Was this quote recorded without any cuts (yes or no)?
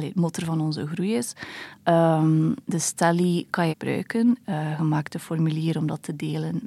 no